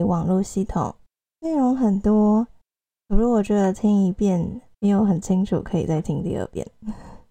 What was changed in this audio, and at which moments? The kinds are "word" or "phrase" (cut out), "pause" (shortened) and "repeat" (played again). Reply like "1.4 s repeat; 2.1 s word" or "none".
none